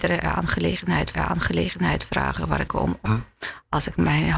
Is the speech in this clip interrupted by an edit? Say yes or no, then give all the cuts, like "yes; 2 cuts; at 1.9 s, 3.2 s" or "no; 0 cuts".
yes; 3 cuts; at 1.1 s, 2.7 s, 3.1 s